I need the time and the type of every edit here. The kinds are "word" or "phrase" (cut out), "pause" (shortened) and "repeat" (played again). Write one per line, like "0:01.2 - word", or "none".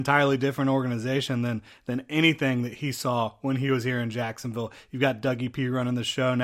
none